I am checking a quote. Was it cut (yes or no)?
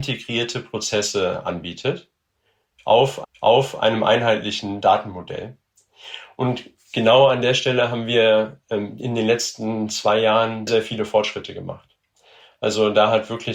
yes